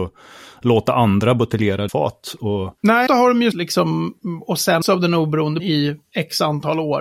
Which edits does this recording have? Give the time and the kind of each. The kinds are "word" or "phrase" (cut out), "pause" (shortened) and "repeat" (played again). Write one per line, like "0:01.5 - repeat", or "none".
0:01.9 - word
0:03.1 - word
0:03.5 - word
0:04.8 - word
0:05.6 - word

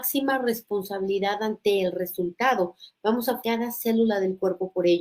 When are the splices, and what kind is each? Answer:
0:03.4 - word

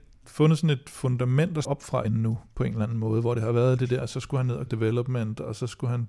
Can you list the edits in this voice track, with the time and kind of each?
0:01.6 - word
0:02.0 - word
0:04.0 - word
0:04.7 - word

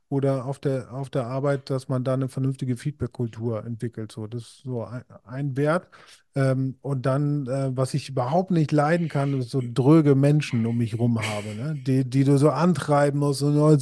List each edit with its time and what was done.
none

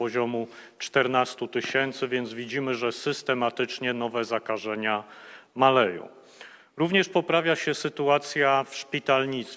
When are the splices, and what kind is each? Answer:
none

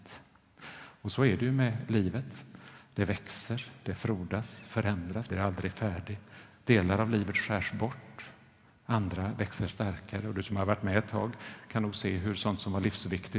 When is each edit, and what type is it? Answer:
0:05.3 - word
0:09.7 - word

